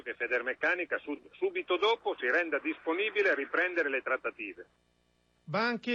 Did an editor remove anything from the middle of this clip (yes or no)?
no